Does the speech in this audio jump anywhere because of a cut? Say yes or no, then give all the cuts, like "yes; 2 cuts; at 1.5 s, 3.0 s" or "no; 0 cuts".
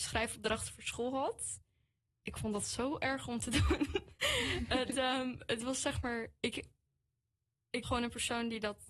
yes; 1 cut; at 7.8 s